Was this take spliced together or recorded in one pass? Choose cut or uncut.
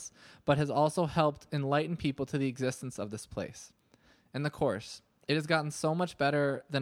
uncut